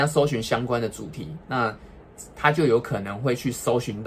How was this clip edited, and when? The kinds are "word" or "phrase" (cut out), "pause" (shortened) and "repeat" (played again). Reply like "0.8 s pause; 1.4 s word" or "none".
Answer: 2.3 s pause